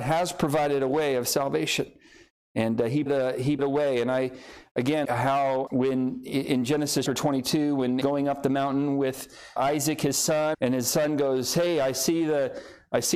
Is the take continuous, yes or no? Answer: no